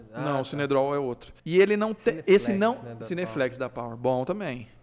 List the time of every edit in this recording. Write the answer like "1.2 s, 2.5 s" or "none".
1.4 s